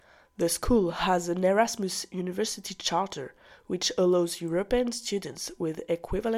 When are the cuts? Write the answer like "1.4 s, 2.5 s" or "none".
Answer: none